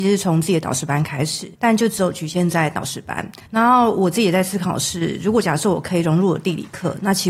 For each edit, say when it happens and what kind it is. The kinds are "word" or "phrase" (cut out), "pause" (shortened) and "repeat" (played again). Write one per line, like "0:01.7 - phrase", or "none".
0:01.5 - pause
0:03.5 - pause